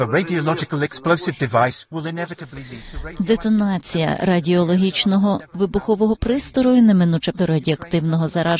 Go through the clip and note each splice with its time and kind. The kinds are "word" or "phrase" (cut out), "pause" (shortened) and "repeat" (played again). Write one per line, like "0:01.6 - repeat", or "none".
0:07.3 - word